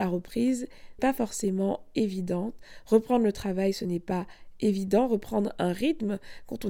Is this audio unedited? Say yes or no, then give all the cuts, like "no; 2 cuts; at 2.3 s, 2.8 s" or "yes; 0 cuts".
no; 1 cut; at 1.0 s